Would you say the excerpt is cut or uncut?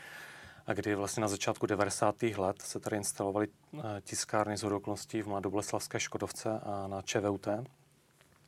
uncut